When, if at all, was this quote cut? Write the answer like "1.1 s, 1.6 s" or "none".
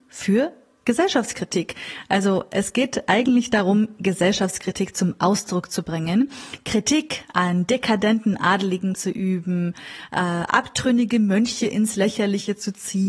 none